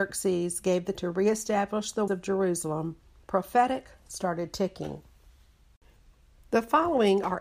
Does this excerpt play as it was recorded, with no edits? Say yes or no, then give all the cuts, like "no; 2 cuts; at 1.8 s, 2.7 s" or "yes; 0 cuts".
no; 4 cuts; at 0.9 s, 2.1 s, 3.2 s, 4.1 s